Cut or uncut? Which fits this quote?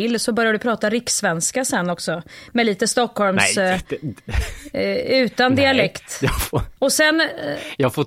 cut